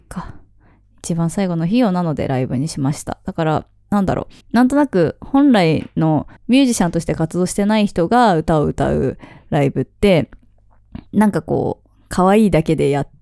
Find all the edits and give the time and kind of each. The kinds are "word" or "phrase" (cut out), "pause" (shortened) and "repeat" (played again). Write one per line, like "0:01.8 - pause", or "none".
0:04.4 - pause
0:06.4 - pause
0:11.1 - pause